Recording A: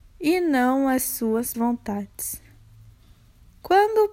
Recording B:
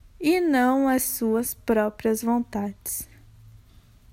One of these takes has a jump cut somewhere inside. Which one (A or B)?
A